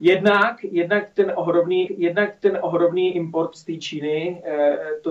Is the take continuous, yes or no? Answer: no